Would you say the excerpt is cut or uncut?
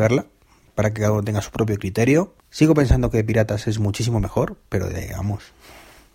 cut